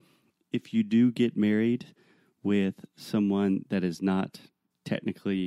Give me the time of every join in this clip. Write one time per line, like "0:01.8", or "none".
none

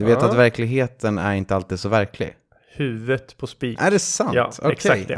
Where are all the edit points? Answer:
none

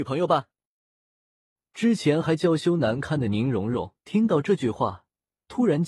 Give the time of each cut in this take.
0:04.0

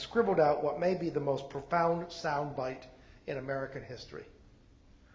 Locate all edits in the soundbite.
none

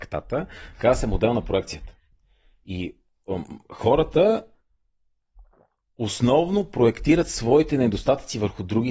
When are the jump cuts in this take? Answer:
none

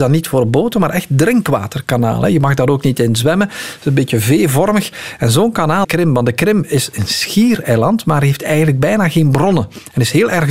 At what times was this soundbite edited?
0:05.8

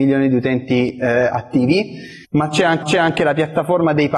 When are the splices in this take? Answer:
0:02.2
0:02.8

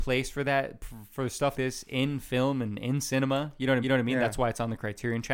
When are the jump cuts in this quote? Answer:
0:01.5
0:03.8

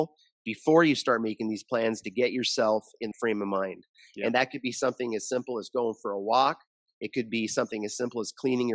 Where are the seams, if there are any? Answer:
0:03.1

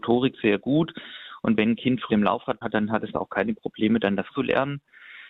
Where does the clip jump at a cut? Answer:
0:02.1
0:02.6
0:03.1
0:04.3

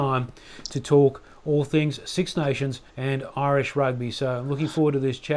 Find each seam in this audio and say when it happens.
0:02.9

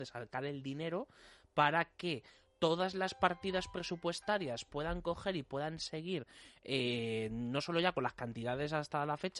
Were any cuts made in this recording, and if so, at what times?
none

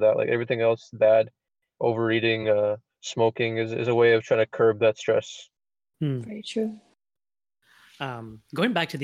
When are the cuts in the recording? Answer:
none

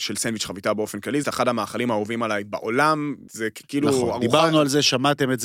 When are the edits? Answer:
0:01.2
0:03.3

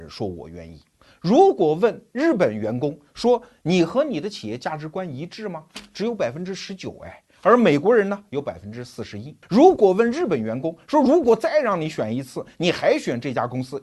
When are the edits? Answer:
0:09.4

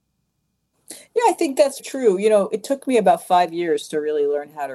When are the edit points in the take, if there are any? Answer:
0:01.8

